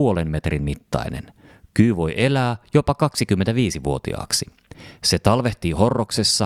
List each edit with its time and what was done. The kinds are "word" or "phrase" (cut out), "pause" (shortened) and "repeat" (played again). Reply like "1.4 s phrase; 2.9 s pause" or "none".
none